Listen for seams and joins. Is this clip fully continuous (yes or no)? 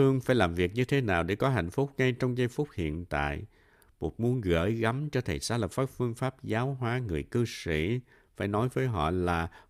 yes